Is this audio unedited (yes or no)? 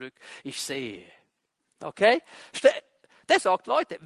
no